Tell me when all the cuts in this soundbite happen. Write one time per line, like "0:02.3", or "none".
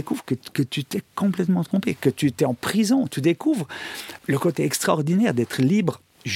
none